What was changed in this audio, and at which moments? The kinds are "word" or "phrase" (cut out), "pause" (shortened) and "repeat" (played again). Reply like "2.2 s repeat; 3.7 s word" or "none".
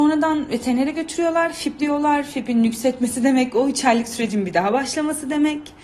1.8 s word